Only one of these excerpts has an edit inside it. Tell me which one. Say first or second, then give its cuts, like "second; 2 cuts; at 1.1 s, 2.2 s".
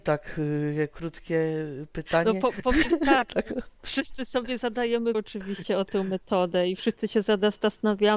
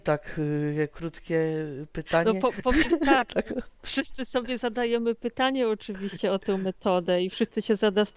first; 1 cut; at 5.1 s